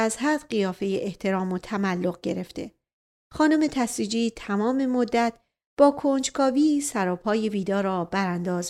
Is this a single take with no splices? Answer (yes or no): yes